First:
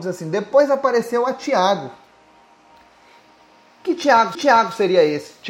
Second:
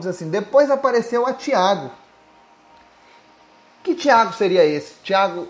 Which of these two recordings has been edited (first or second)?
first